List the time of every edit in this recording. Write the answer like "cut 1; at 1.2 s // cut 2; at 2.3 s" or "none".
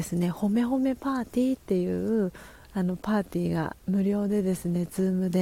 cut 1; at 3.8 s